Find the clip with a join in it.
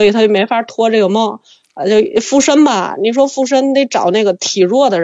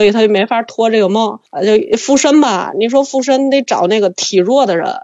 second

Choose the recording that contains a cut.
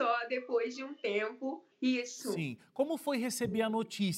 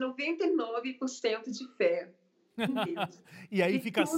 first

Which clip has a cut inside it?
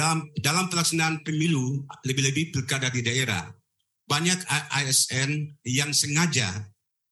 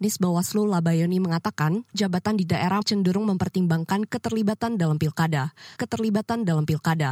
second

